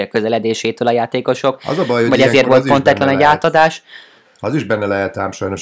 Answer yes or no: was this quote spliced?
no